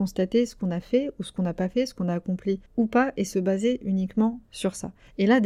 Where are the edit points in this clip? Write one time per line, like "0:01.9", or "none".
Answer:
0:02.7